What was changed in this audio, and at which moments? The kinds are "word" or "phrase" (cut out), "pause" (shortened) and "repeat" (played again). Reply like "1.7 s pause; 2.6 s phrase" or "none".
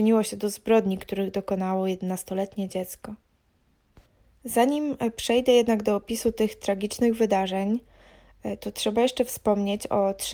none

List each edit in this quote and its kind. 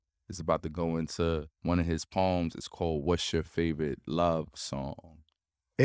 1.5 s pause

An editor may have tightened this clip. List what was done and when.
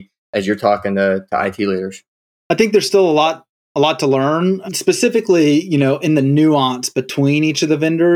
none

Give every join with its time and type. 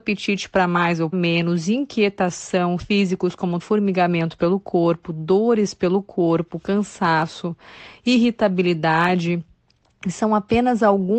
1.1 s word; 2.8 s word; 3.6 s word

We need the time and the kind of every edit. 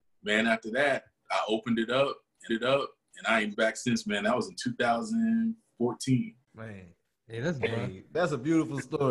2.5 s repeat; 3.5 s word; 6.4 s pause; 7.6 s word

